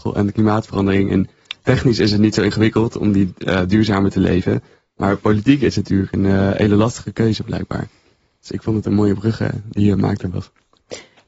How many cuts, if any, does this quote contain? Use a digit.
0